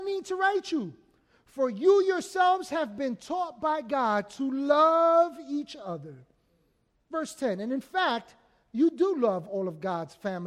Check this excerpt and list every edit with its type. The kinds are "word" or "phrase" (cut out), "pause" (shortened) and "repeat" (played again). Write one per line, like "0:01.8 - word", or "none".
none